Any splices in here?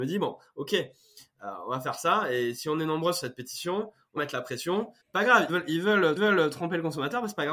yes; 4 cuts; at 4.2 s, 5.0 s, 5.5 s, 6.2 s

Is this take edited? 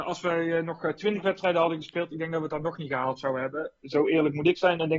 no; 0 cuts

